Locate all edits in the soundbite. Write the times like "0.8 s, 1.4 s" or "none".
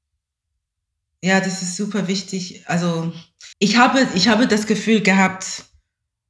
3.5 s